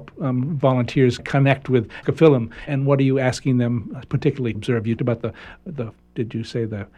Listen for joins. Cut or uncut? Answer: cut